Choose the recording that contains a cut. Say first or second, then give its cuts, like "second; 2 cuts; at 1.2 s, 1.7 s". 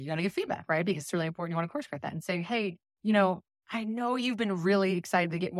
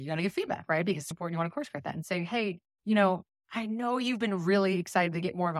second; 1 cut; at 1.1 s